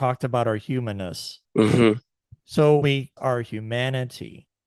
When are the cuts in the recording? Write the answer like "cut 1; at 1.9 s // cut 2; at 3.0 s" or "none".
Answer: cut 1; at 1.5 s // cut 2; at 2.8 s // cut 3; at 3.2 s

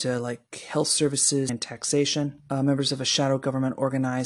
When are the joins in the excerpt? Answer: cut 1; at 1.5 s // cut 2; at 2.4 s

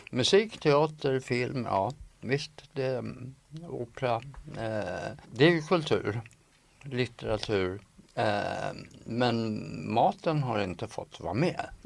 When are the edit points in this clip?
cut 1; at 5.2 s

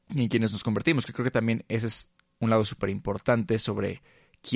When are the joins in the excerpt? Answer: none

